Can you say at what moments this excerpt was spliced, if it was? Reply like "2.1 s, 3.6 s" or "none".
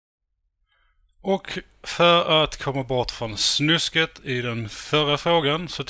none